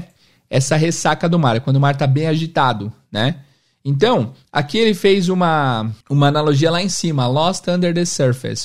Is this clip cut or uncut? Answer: cut